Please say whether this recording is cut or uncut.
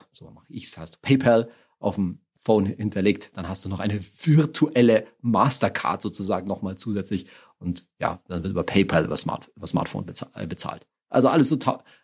uncut